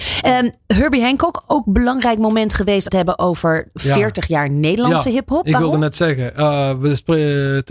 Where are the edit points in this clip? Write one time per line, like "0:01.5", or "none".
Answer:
0:02.9